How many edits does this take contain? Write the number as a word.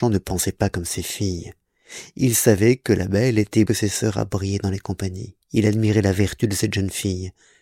two